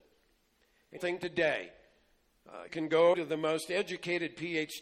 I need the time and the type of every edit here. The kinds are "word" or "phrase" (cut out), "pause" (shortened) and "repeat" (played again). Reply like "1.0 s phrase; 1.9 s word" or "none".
1.0 s phrase; 2.7 s word; 3.1 s word